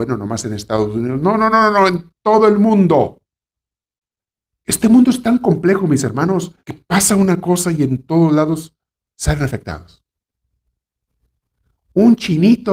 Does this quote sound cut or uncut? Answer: cut